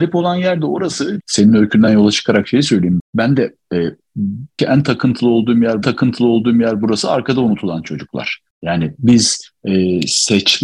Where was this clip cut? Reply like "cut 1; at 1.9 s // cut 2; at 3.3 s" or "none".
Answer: cut 1; at 1.2 s // cut 2; at 3.0 s // cut 3; at 4.6 s // cut 4; at 5.8 s // cut 5; at 8.5 s